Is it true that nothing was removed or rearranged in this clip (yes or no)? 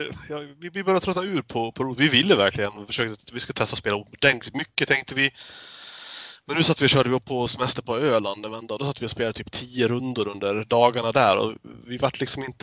yes